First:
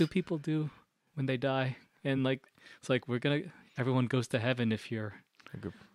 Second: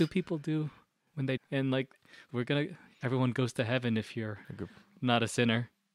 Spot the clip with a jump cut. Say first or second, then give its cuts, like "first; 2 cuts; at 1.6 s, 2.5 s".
second; 3 cuts; at 1.4 s, 2.3 s, 4.4 s